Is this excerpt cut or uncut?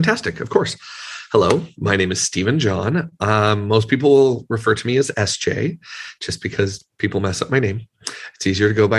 uncut